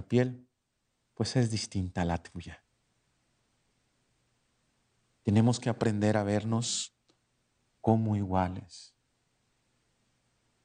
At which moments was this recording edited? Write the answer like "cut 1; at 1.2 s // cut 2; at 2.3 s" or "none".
none

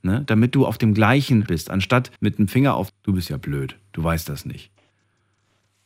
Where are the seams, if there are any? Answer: cut 1; at 1.5 s // cut 2; at 2.2 s // cut 3; at 2.9 s

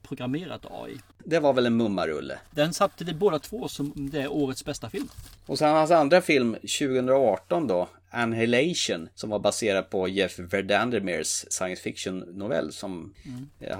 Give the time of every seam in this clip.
cut 1; at 9.1 s

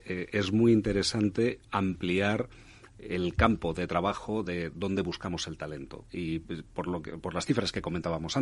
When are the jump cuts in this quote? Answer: none

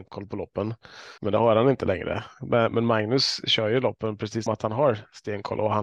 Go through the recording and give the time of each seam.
cut 1; at 1.2 s // cut 2; at 4.5 s

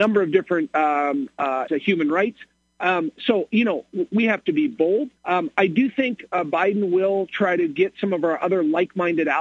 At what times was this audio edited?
cut 1; at 1.7 s // cut 2; at 5.2 s

